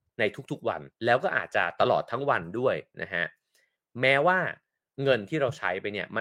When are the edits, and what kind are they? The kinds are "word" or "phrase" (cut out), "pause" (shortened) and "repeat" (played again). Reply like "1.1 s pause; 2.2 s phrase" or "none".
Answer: 0.9 s pause